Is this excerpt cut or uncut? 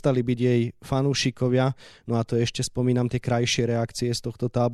uncut